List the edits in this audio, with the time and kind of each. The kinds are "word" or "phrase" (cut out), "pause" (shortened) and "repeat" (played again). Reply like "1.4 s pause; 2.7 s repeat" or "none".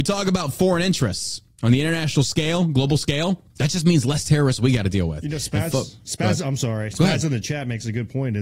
3.5 s pause